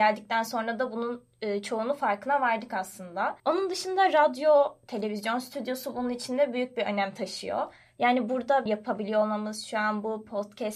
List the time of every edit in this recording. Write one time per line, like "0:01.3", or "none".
0:03.4
0:08.7